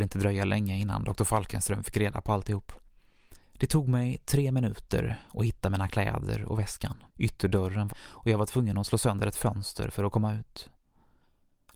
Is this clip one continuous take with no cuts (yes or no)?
no